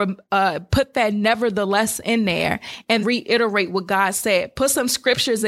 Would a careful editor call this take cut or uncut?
cut